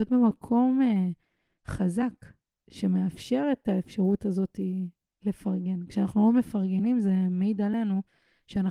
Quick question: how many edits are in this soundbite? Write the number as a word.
zero